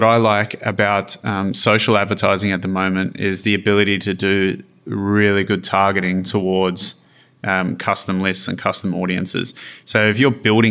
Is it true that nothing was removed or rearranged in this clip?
yes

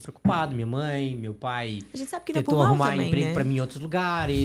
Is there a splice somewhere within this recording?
no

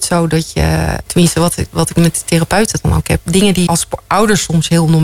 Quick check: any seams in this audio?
yes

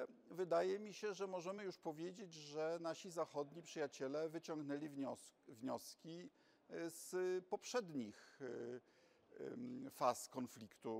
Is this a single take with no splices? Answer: yes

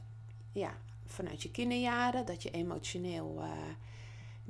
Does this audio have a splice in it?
no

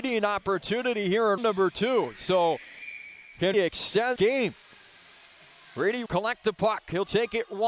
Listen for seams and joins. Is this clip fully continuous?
no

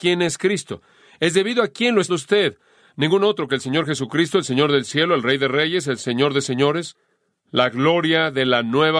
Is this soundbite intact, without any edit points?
no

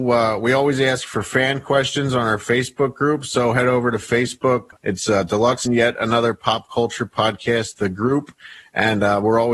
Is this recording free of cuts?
no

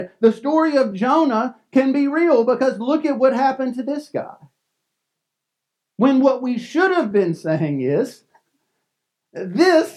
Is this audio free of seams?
yes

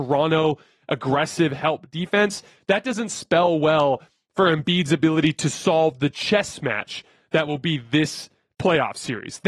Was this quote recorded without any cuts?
yes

